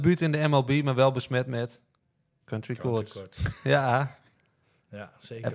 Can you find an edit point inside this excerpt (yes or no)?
no